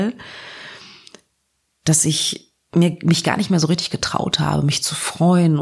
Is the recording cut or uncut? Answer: uncut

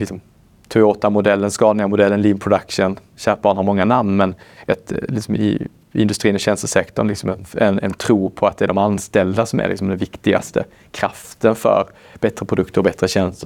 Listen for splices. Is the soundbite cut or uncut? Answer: uncut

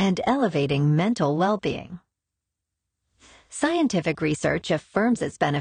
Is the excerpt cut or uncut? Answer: uncut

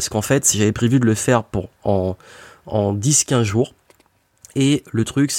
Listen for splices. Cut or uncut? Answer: uncut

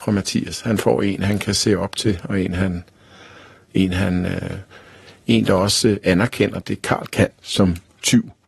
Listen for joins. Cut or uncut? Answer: uncut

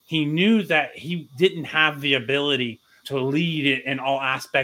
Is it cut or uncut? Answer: cut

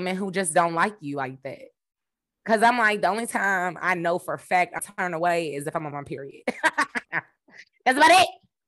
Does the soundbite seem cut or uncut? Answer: cut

